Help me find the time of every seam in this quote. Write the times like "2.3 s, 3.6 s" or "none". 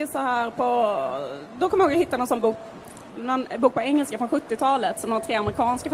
none